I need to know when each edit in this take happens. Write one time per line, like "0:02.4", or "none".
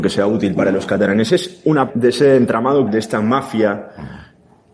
0:01.9
0:02.9